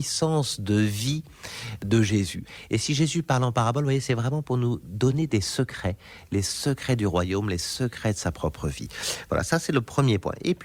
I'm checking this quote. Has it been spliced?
no; 0 cuts

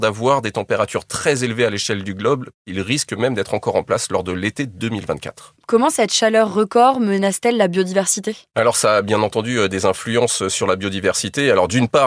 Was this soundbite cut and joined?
no; 0 cuts

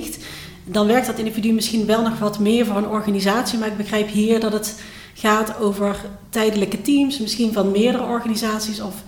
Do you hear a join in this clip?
no; 0 cuts

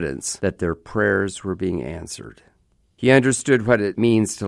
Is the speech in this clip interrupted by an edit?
no; 0 cuts

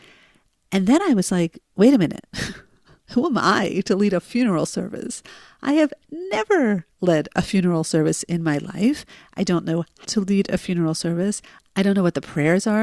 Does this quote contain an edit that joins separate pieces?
yes; 3 cuts; at 1.6 s, 6.9 s, 10.0 s

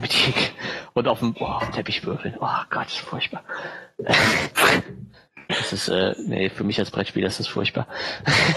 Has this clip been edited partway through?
no; 0 cuts

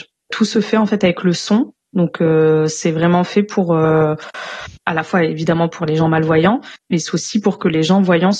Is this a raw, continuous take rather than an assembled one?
yes; 0 cuts

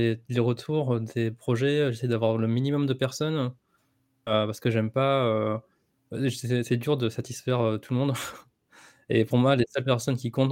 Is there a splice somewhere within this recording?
no; 0 cuts

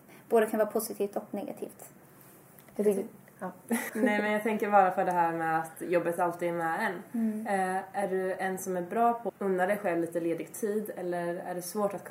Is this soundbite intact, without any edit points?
no; 2 cuts; at 3.9 s, 9.3 s

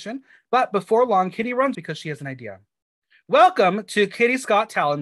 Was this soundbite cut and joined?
yes; 1 cut; at 1.7 s

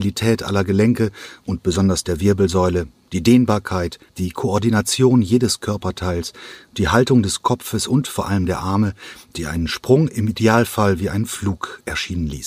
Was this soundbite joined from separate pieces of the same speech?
yes; 1 cut; at 4.1 s

